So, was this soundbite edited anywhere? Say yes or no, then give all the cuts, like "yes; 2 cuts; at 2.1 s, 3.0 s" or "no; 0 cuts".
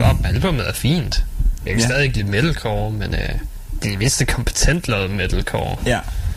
no; 0 cuts